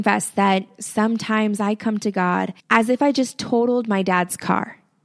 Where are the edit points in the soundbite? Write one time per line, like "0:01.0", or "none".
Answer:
0:02.6